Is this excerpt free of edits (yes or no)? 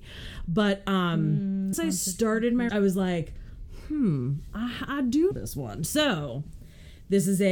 no